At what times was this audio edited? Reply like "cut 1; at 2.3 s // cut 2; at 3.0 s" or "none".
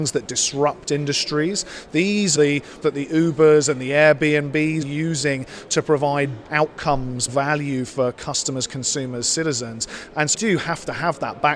cut 1; at 2.3 s // cut 2; at 2.8 s // cut 3; at 4.8 s // cut 4; at 6.4 s // cut 5; at 7.3 s // cut 6; at 10.3 s